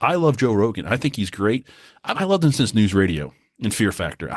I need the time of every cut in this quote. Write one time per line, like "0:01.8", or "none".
0:02.1